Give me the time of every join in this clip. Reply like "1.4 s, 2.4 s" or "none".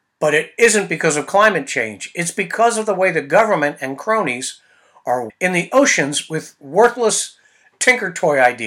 5.3 s